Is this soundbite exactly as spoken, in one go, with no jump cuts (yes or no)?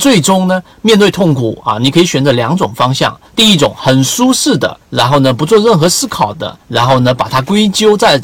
no